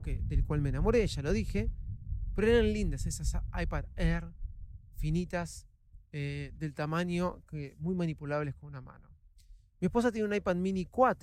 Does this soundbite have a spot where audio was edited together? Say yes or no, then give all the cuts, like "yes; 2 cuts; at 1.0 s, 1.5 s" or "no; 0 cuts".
no; 0 cuts